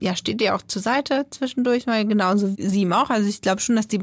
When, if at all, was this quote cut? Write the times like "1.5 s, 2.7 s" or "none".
2.5 s

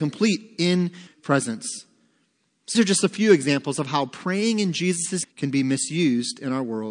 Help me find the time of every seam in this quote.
1.1 s, 2.7 s, 5.2 s

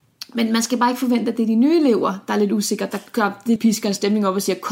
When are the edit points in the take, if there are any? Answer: 3.6 s

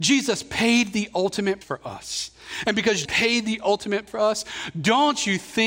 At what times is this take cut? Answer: 1.6 s, 3.1 s, 4.1 s

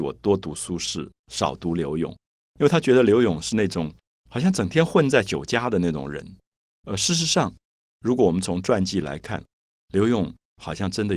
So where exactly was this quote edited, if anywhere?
none

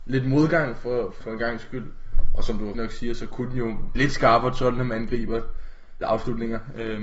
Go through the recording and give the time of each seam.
1.2 s, 2.7 s, 3.9 s, 6.0 s

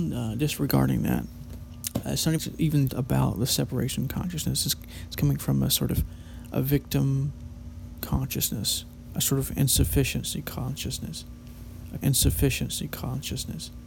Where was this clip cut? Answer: 2.4 s, 2.9 s, 12.0 s

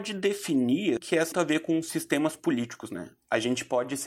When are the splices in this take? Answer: 1.0 s, 1.3 s

